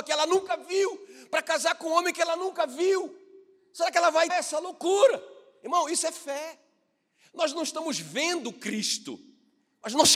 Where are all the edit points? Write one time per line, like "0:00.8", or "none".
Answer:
0:04.3